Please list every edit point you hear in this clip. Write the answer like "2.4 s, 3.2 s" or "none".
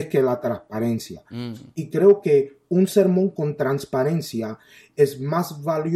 none